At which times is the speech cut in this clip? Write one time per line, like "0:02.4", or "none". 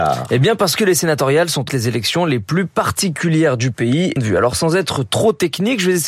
0:01.7
0:04.2